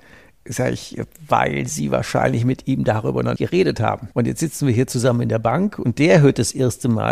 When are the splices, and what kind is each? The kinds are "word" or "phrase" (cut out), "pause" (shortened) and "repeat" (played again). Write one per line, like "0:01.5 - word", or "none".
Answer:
0:03.4 - word
0:04.1 - pause